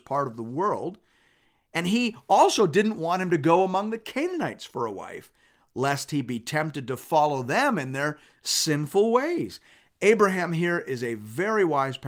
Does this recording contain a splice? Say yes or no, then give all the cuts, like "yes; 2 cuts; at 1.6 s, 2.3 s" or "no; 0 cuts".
no; 0 cuts